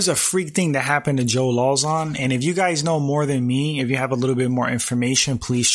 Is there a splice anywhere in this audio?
no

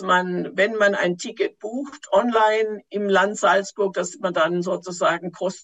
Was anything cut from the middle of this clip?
no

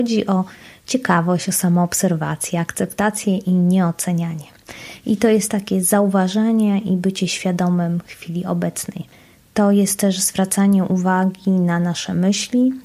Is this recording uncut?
yes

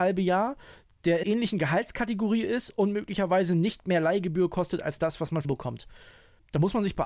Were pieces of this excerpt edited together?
yes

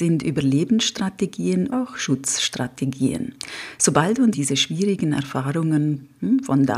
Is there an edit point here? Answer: yes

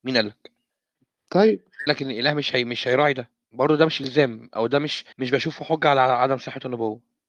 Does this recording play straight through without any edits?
no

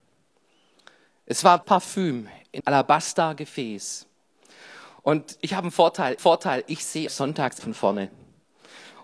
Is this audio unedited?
no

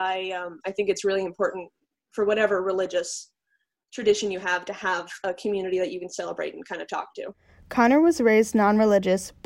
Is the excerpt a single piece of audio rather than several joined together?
yes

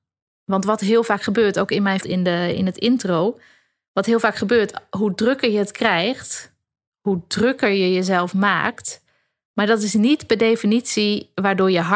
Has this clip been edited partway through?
yes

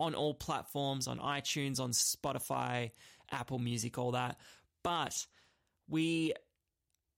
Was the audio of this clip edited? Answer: no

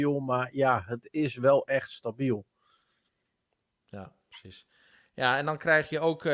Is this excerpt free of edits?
yes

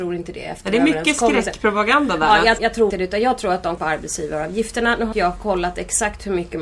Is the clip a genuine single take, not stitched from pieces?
no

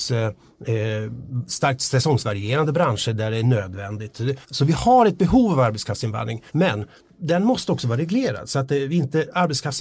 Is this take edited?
yes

